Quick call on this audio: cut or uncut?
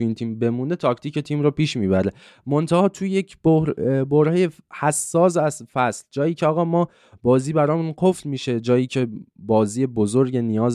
uncut